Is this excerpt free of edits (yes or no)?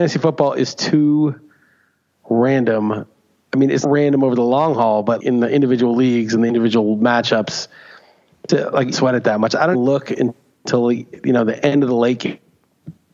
no